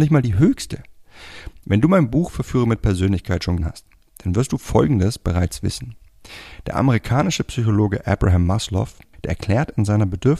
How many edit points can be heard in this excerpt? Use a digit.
1